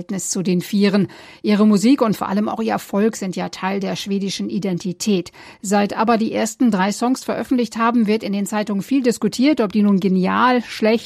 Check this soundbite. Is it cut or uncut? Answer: uncut